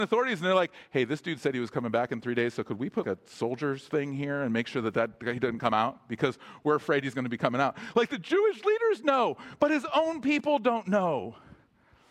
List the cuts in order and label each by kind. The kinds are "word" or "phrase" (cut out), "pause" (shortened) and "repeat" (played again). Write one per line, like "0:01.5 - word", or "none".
0:03.0 - word